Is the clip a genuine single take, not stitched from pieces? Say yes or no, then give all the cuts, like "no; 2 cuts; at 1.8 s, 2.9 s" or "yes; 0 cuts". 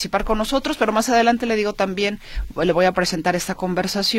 yes; 0 cuts